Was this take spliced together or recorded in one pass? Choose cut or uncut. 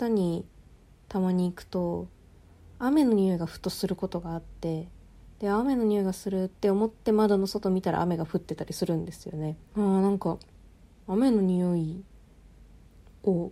cut